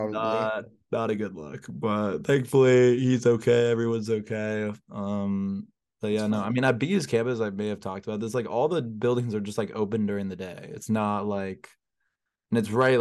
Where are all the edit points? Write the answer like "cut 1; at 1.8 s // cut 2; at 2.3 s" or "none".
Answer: none